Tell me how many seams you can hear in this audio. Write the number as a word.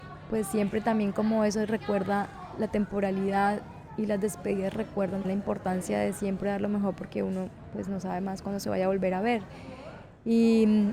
one